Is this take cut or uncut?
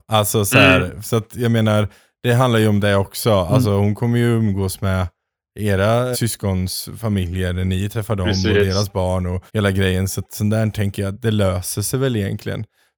cut